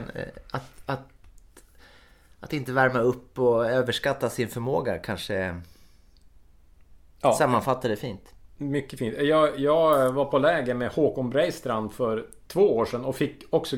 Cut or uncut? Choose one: uncut